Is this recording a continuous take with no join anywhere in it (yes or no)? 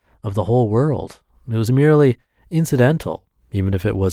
yes